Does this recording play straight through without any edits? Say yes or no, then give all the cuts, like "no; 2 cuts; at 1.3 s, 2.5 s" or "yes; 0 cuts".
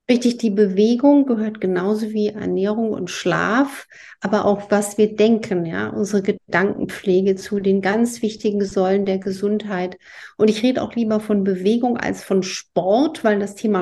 yes; 0 cuts